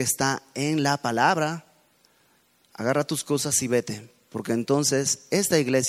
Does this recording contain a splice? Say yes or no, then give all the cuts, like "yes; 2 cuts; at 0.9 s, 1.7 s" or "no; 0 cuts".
no; 0 cuts